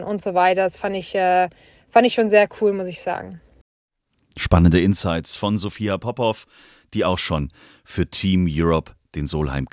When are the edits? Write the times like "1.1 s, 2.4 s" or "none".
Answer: none